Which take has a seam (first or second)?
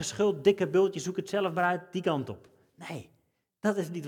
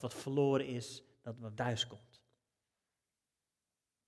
second